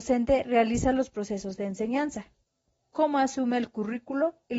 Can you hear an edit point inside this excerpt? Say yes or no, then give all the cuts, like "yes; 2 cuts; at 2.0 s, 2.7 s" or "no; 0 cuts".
no; 0 cuts